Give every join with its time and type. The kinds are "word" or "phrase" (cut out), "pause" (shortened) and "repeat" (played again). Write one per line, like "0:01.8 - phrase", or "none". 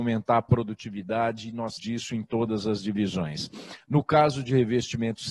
0:01.8 - phrase